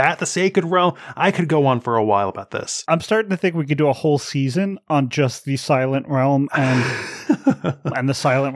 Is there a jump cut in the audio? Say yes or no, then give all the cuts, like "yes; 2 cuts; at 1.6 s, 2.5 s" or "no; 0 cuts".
no; 0 cuts